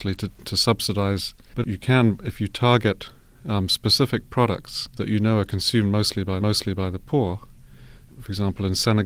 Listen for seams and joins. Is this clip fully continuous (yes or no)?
no